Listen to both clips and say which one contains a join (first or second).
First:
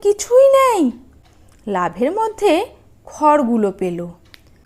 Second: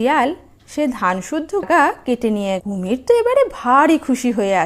second